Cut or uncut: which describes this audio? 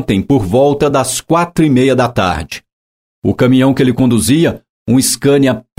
uncut